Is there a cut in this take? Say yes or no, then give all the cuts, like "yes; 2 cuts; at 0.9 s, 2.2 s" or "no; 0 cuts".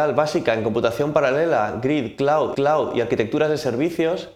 yes; 1 cut; at 2.5 s